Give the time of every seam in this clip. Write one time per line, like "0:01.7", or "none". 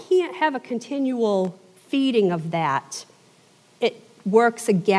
none